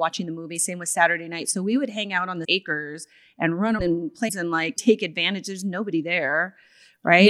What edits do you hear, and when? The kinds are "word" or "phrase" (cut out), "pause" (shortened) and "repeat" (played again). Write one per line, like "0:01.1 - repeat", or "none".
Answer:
0:02.4 - word
0:03.8 - word
0:04.3 - word